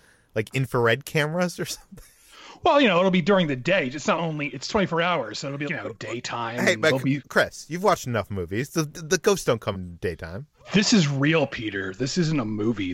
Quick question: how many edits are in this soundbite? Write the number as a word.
four